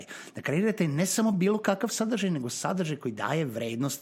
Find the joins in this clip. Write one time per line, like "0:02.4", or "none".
none